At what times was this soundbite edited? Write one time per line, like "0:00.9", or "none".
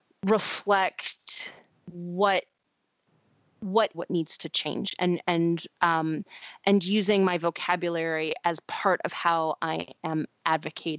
0:01.7
0:03.9
0:05.7